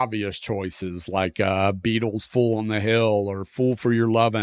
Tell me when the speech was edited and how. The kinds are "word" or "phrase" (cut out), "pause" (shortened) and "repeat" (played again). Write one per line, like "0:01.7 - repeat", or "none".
none